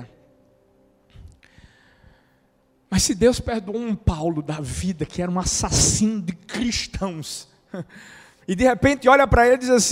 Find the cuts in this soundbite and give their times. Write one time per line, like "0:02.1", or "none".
none